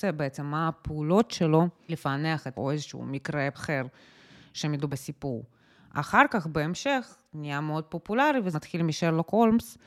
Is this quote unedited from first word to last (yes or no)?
no